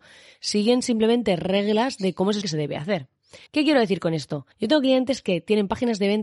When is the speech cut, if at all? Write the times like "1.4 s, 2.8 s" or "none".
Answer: 2.4 s, 3.5 s, 4.5 s